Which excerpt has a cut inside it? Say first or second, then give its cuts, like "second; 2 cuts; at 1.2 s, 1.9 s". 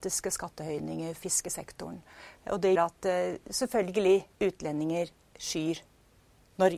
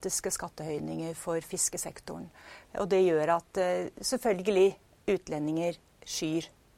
first; 3 cuts; at 1.2 s, 2.8 s, 4.3 s